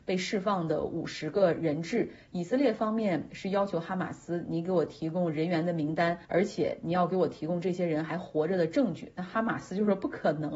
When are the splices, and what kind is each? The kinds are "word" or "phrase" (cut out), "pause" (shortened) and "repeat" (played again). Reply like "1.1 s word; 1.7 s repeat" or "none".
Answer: 6.2 s pause